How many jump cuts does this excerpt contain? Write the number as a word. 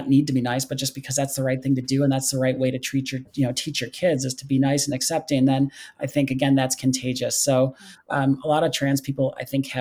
zero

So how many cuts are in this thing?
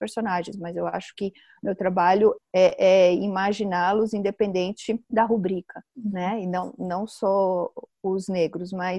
zero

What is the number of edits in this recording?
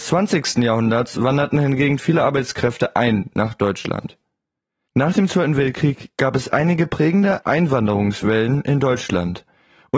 zero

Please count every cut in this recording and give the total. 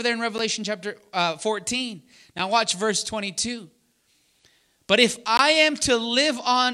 zero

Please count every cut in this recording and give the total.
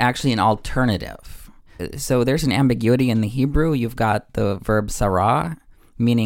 zero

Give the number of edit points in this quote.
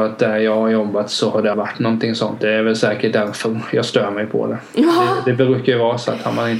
one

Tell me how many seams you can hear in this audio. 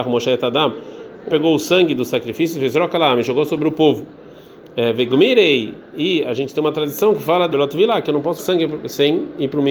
three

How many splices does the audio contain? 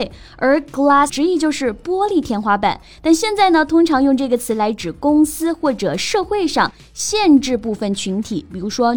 one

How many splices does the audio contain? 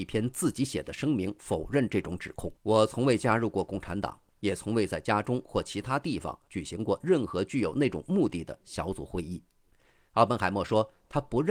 one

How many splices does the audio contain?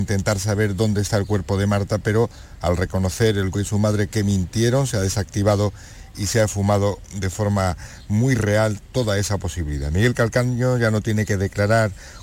one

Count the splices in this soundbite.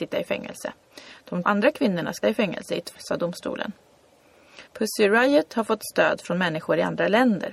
four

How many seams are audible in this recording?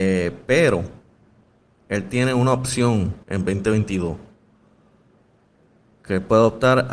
one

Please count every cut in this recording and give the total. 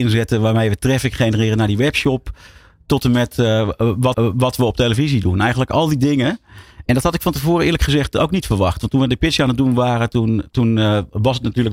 one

